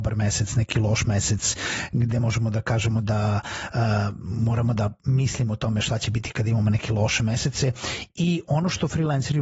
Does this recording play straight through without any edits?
yes; 0 cuts

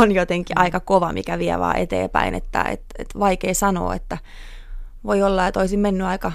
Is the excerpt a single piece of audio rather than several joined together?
yes; 0 cuts

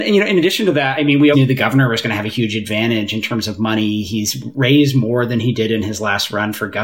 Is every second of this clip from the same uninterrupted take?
no; 1 cut; at 1.3 s

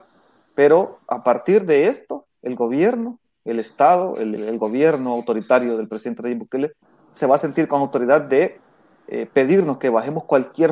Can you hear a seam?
yes; 2 cuts; at 4.4 s, 6.8 s

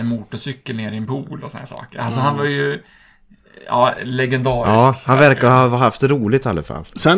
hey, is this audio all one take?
yes; 0 cuts

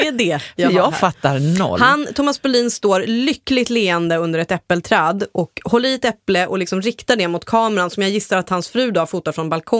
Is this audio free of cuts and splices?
yes; 0 cuts

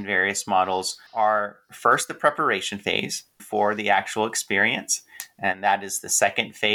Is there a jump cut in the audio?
yes; 2 cuts; at 1.1 s, 3.4 s

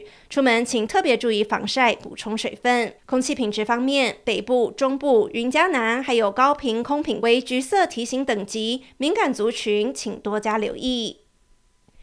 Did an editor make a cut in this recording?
yes; 1 cut; at 3.0 s

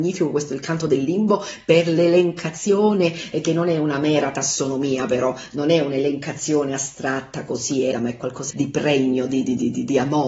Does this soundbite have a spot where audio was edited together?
yes; 2 cuts; at 7.9 s, 8.5 s

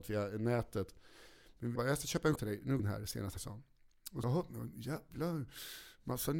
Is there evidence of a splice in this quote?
yes; 5 cuts; at 1.8 s, 2.4 s, 2.8 s, 3.4 s, 4.2 s

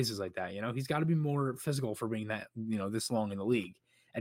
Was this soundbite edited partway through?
no; 0 cuts

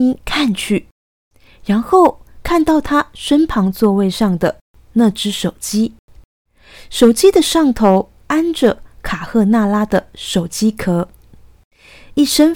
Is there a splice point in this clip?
no; 0 cuts

